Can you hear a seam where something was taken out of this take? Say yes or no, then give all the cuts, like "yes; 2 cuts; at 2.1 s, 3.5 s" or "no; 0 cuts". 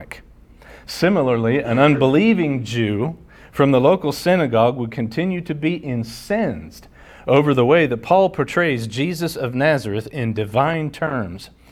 no; 0 cuts